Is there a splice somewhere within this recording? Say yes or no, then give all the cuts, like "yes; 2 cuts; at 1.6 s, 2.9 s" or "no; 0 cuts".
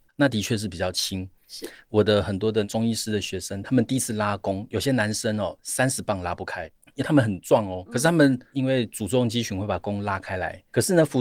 yes; 1 cut; at 7.9 s